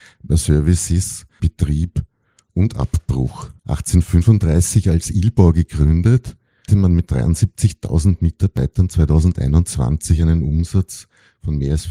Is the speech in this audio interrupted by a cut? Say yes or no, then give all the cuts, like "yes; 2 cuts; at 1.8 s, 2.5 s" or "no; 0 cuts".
yes; 4 cuts; at 1.4 s, 3.6 s, 6.7 s, 7.1 s